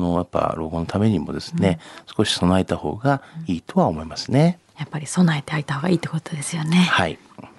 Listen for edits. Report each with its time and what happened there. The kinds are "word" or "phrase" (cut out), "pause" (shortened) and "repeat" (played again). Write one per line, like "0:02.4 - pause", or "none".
0:04.7 - pause